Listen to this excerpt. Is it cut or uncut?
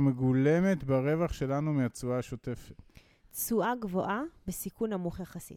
uncut